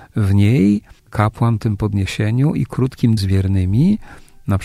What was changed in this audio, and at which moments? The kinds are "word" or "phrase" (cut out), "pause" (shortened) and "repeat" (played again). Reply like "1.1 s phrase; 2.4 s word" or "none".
1.6 s word; 3.2 s word